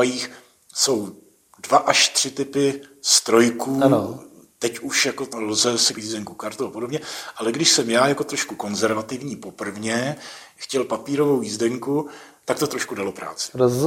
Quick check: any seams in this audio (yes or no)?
yes